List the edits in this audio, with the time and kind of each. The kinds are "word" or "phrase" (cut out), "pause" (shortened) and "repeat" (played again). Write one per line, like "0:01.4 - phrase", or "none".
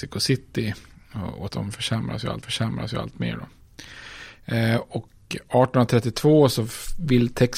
0:01.5 - word
0:02.4 - repeat